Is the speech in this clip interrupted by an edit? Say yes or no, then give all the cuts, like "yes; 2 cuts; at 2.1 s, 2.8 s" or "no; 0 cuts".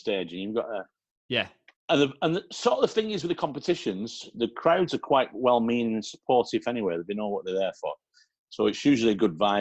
no; 0 cuts